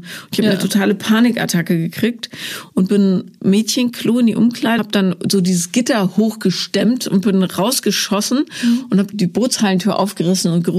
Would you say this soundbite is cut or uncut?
cut